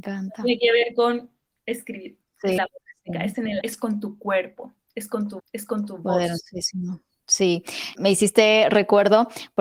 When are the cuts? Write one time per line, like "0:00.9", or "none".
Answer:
0:01.5
0:02.6
0:03.6
0:05.4
0:07.9